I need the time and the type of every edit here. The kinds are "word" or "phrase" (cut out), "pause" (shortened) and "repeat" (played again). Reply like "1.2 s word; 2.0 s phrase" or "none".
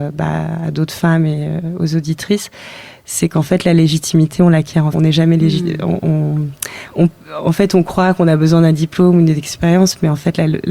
4.9 s word; 6.9 s word